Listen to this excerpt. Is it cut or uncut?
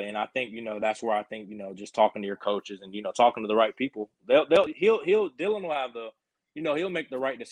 uncut